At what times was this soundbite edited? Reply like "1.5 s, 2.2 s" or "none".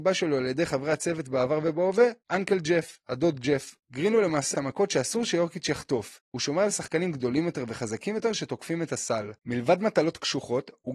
2.2 s, 3.8 s, 4.5 s, 6.2 s, 9.4 s